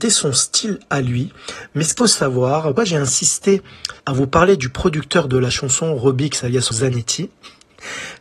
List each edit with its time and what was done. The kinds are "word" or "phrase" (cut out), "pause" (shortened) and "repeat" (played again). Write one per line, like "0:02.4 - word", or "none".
0:02.0 - word
0:02.8 - word
0:04.0 - pause
0:06.7 - word